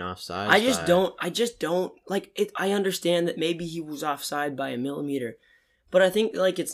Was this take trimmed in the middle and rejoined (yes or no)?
no